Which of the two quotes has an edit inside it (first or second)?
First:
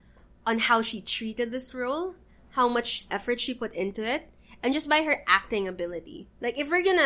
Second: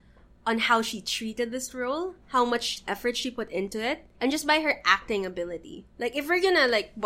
second